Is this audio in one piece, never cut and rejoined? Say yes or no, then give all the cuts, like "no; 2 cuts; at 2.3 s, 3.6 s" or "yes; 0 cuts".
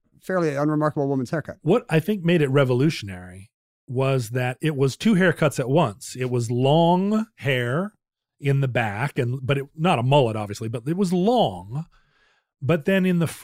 yes; 0 cuts